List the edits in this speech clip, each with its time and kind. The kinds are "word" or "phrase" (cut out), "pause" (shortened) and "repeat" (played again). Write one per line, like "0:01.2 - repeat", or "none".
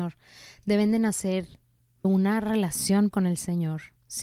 0:02.0 - word
0:03.1 - word